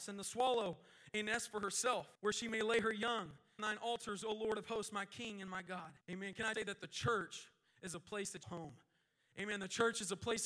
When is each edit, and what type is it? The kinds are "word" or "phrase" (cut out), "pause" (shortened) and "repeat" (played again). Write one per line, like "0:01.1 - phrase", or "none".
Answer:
0:02.1 - pause
0:03.6 - word
0:06.0 - pause
0:06.5 - word
0:08.4 - phrase